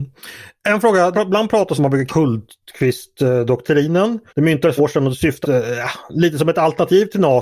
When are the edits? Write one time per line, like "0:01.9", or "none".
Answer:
0:01.1
0:01.8
0:02.1
0:04.3
0:04.8
0:05.4